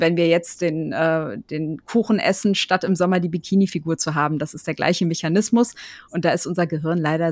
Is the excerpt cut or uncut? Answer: uncut